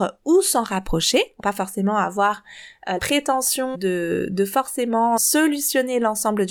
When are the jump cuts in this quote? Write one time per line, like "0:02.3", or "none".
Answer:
0:01.4
0:03.0
0:03.7
0:05.2